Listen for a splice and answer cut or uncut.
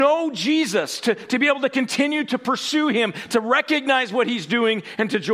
uncut